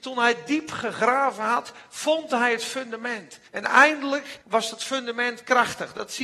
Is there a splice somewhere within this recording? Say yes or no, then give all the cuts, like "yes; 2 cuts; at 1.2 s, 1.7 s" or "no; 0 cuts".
yes; 2 cuts; at 3.5 s, 4.4 s